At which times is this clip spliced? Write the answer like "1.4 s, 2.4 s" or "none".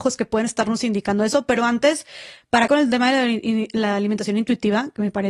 2.7 s